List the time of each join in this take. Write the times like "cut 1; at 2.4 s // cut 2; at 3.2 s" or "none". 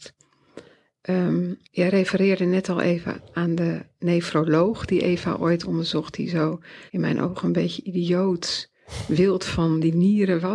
cut 1; at 1.6 s // cut 2; at 6.9 s